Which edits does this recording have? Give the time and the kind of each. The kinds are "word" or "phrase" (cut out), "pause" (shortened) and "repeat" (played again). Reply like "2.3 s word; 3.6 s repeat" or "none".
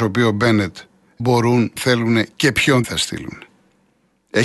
1.2 s word; 1.8 s word; 2.8 s word